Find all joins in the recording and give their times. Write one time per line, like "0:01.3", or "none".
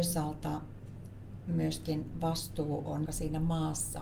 0:03.1